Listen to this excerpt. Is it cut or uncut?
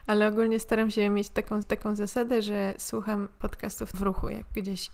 cut